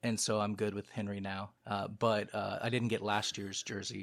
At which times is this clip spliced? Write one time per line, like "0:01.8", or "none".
0:01.6